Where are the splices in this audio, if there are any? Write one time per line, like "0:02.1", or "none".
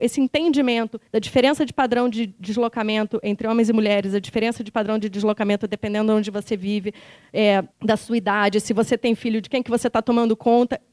0:01.1
0:07.7

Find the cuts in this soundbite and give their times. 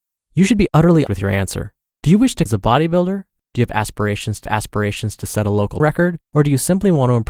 0:01.1
0:01.9
0:02.5
0:04.4
0:05.8
0:06.3

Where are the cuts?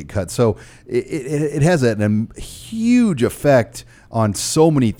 none

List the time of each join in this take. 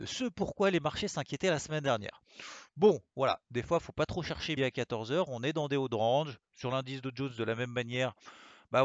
0:04.6

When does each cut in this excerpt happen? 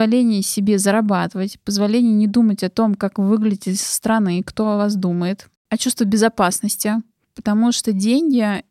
none

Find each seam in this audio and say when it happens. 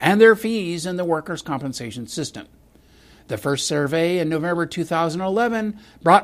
none

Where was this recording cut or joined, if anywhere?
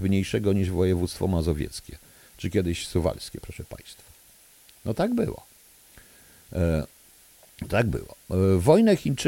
none

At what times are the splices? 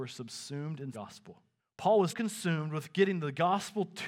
0:00.9
0:01.6
0:02.1

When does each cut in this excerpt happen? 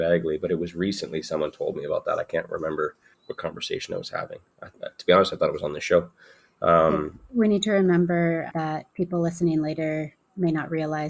0:03.1
0:08.5

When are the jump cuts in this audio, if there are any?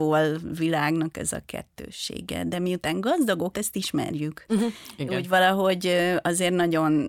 0:03.5

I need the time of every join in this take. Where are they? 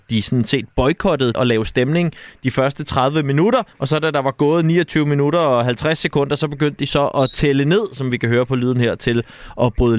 0:01.3
0:03.7

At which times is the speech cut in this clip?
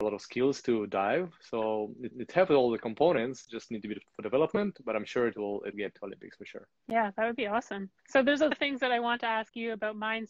0:02.1
0:04.0
0:05.7
0:06.8
0:08.0
0:08.5

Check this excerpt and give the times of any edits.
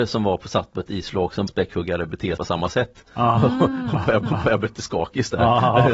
0:01.5
0:02.4
0:04.2

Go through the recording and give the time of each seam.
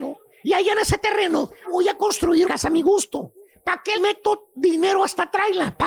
0:01.6
0:02.4
0:03.9

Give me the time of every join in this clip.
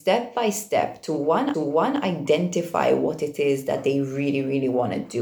0:01.5

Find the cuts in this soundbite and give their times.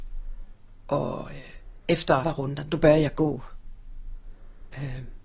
0:02.2

